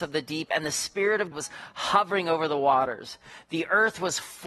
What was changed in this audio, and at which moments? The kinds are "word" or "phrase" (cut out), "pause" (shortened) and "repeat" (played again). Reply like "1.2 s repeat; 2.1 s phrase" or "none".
1.3 s word

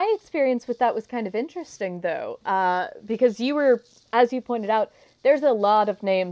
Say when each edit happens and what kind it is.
none

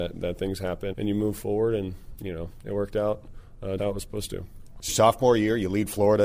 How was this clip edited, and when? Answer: 0.9 s word; 3.8 s word; 4.9 s word

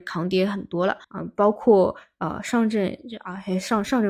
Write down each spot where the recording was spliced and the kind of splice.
1.0 s pause

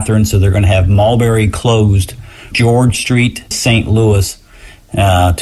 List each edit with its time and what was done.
2.5 s word; 3.5 s word

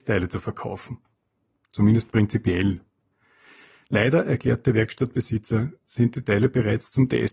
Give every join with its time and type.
none

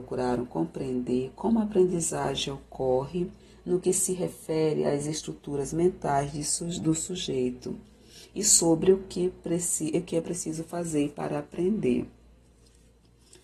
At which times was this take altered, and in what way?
3.4 s pause

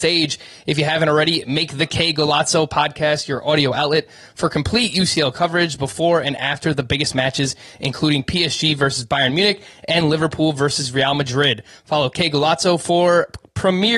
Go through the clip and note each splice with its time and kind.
none

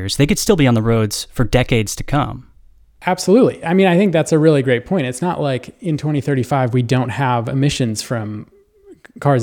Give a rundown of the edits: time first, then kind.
none

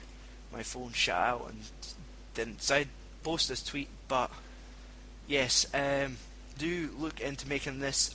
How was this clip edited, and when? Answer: 6.6 s word

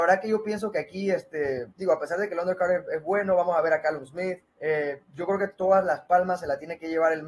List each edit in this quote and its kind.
1.7 s pause; 4.5 s pause

